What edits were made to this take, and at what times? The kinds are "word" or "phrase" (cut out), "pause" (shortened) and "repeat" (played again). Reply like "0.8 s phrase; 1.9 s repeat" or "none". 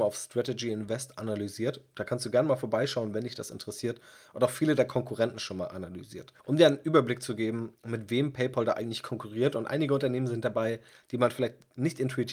6.4 s pause